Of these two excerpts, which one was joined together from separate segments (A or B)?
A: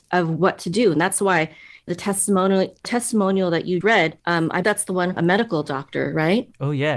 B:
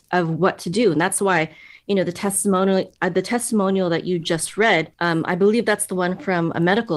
A